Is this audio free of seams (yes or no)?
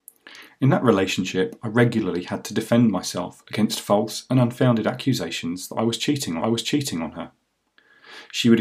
no